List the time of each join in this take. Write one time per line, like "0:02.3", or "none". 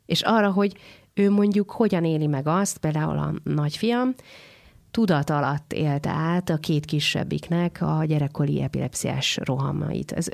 none